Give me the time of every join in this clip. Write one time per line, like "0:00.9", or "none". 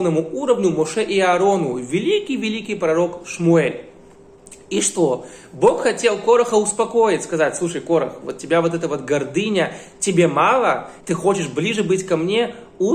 0:11.0